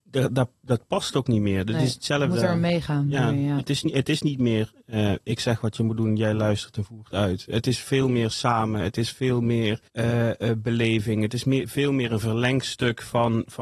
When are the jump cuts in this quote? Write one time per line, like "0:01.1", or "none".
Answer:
0:09.9

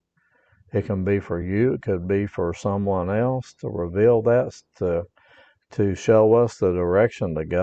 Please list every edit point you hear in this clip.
none

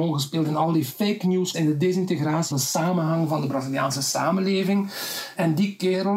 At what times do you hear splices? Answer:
0:01.5
0:02.5

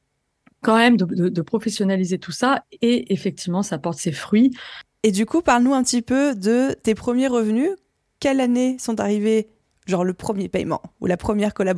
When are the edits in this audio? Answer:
none

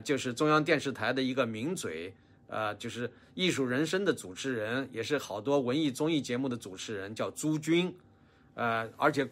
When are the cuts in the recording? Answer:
none

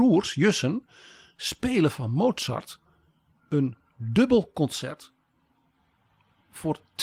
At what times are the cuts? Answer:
none

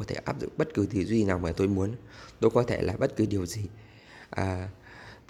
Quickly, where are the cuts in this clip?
none

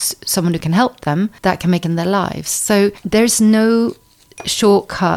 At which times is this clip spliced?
0:01.8
0:03.0

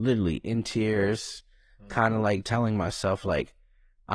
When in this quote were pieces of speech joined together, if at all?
0:02.4

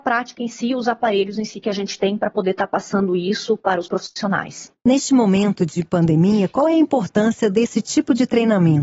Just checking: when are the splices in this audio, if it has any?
0:04.8

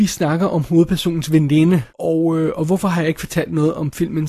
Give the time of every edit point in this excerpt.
0:01.9

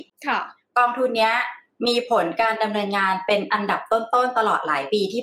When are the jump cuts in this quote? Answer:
none

